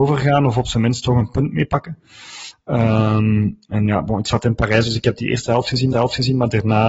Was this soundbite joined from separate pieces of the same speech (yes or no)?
yes